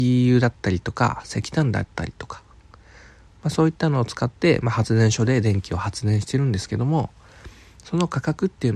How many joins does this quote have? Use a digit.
0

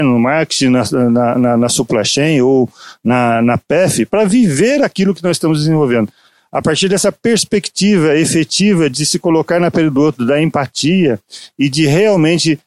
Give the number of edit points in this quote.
0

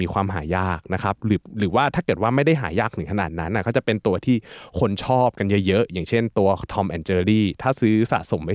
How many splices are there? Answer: 0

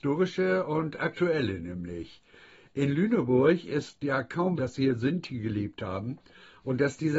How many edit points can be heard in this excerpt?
1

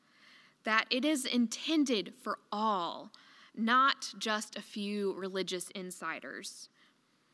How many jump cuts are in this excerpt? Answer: 0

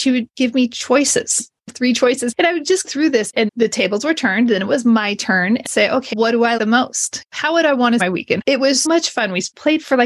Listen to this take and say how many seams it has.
7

